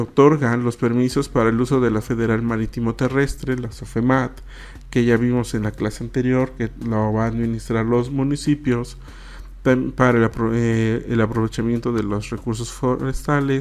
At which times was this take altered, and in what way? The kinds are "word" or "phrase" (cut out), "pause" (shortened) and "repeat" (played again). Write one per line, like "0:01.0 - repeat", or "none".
0:02.0 - word